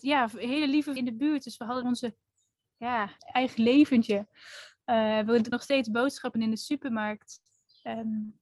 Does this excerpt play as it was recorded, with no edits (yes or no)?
no